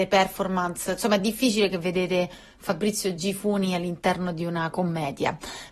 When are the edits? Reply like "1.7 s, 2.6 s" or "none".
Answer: none